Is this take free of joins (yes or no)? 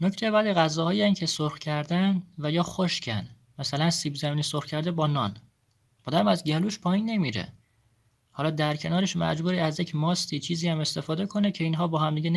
yes